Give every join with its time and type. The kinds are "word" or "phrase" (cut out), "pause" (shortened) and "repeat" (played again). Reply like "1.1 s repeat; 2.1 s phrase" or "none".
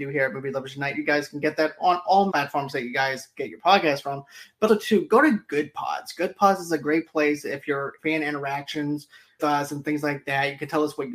2.3 s word; 4.7 s word; 8.0 s word; 9.4 s word

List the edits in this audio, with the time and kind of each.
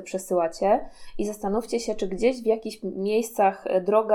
none

